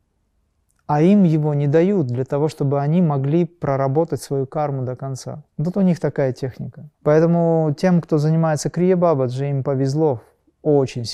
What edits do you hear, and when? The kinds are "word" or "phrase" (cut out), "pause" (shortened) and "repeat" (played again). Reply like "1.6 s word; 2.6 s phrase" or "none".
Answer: 5.5 s pause; 6.9 s pause